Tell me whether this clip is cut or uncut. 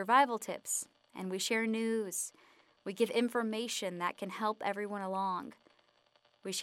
uncut